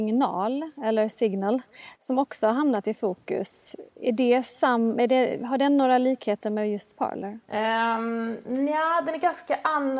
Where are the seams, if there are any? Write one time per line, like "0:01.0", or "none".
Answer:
0:07.4